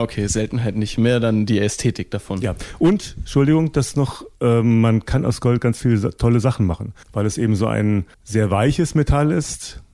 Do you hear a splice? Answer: yes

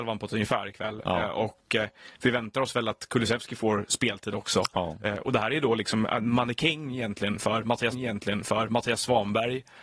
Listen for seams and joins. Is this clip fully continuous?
no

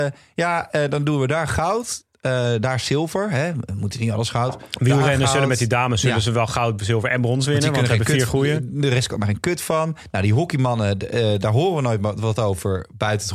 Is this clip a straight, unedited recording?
yes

